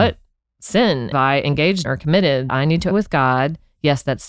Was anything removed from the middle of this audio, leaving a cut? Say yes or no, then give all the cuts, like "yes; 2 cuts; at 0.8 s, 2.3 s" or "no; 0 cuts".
yes; 4 cuts; at 1.1 s, 1.8 s, 2.5 s, 2.9 s